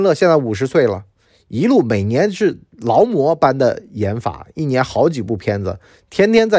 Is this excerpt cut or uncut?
uncut